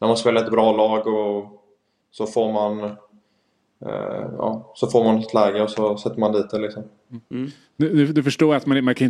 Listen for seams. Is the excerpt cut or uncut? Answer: uncut